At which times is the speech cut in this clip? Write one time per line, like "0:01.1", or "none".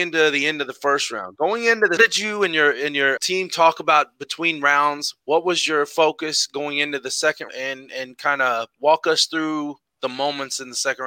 0:02.0
0:03.2
0:07.5